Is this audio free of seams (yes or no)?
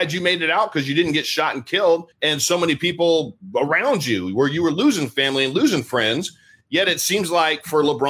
no